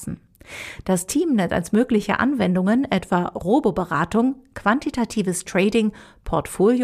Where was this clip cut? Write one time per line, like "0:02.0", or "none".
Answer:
none